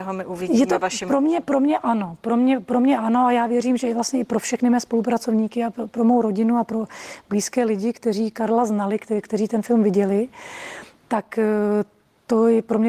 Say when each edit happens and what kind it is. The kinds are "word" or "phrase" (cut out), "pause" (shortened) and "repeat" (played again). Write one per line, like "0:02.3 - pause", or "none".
none